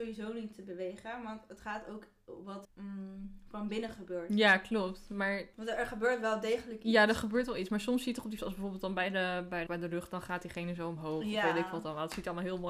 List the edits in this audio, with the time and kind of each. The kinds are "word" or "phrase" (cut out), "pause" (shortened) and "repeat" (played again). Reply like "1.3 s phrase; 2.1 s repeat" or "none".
2.6 s word; 5.5 s pause; 8.4 s word; 9.7 s phrase